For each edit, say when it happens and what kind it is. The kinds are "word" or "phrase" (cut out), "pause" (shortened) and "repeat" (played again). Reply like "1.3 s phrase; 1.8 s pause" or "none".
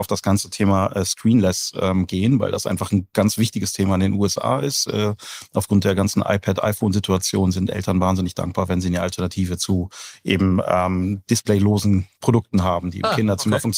none